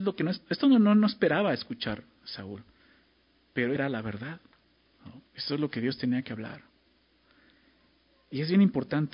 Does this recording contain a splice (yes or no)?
yes